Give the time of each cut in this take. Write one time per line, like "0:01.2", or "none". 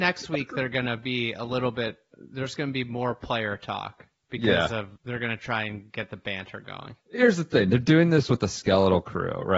0:05.0
0:07.0